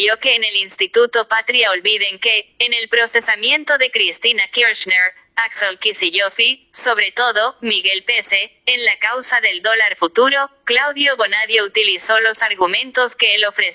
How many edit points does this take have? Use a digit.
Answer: 0